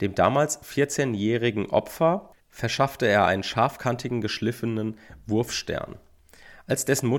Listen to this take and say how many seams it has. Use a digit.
1